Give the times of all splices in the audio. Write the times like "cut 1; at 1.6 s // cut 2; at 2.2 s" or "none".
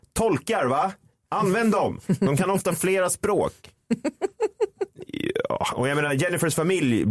none